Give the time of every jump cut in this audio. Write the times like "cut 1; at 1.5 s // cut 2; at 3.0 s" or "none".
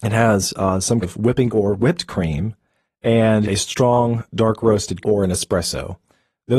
cut 1; at 1.0 s // cut 2; at 1.5 s // cut 3; at 3.4 s // cut 4; at 5.0 s